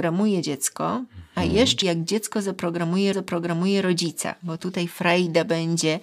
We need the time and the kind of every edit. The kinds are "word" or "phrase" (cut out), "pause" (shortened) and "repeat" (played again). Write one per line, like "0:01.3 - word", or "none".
0:01.8 - word
0:03.1 - repeat